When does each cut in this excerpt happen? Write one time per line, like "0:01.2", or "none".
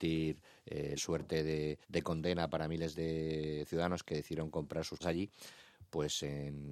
0:01.0
0:01.8
0:02.9
0:05.0